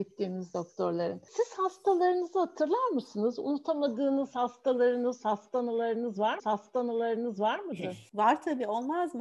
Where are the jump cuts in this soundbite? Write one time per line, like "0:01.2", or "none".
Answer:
0:06.4